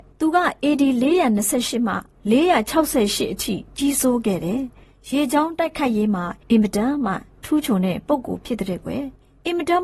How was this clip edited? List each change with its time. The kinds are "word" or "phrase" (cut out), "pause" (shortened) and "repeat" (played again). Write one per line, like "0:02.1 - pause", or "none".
none

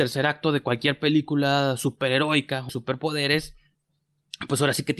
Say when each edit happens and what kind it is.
0:02.7 - word

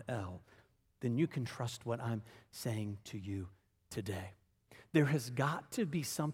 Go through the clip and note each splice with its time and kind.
none

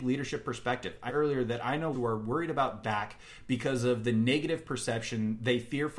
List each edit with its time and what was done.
0:01.1 - word
0:01.9 - word
0:02.8 - word

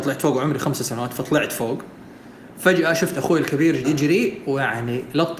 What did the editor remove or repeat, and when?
0:03.8 - word

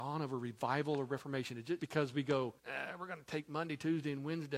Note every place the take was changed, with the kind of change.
0:01.8 - word
0:02.6 - pause

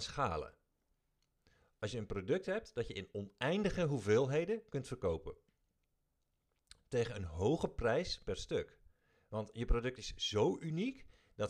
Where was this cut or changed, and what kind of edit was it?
none

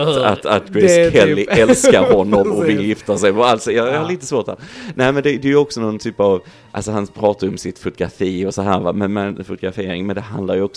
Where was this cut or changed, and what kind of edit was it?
none

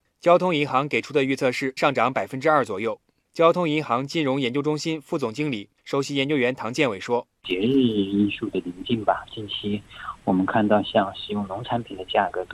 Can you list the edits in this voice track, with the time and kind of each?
0:01.8 - word
0:05.8 - pause

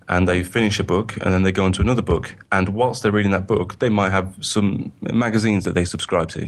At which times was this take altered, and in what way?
0:02.4 - pause

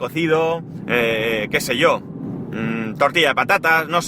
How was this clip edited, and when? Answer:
none

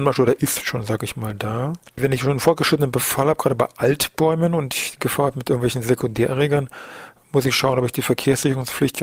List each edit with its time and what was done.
none

